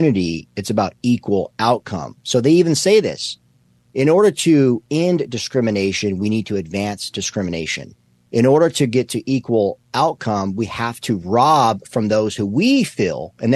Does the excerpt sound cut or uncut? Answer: uncut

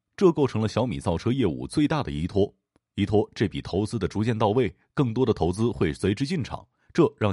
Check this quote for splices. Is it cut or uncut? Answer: uncut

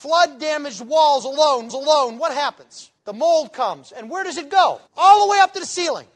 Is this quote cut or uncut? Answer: cut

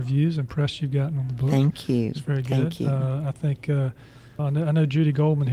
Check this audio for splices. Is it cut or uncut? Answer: cut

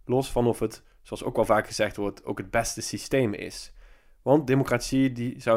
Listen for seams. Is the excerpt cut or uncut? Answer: uncut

